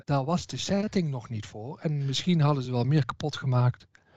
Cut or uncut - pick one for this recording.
uncut